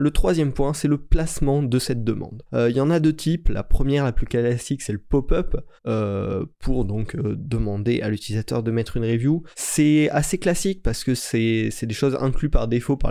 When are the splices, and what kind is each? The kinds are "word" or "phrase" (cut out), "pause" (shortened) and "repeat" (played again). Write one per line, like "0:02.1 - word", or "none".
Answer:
0:02.5 - pause
0:05.8 - pause
0:09.5 - pause